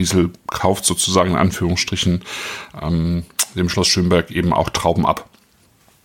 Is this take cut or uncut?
uncut